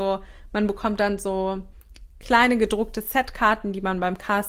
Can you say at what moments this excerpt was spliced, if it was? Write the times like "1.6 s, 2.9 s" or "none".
none

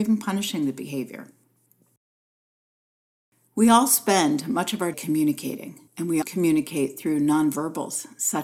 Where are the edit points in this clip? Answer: 4.9 s, 5.9 s, 6.2 s

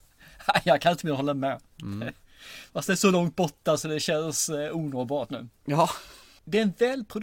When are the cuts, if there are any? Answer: 5.3 s

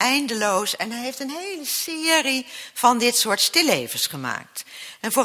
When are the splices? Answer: none

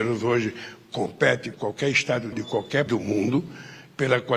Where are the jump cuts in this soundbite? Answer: 1.5 s, 2.3 s, 2.9 s

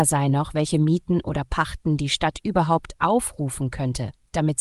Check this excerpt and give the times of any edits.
none

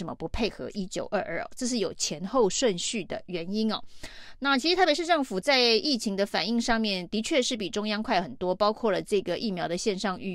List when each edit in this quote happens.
none

